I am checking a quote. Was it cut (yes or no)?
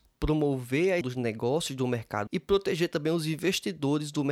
yes